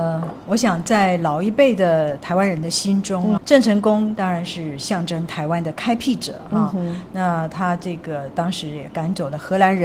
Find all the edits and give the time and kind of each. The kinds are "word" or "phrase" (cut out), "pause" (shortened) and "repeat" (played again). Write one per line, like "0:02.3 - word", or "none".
0:03.4 - word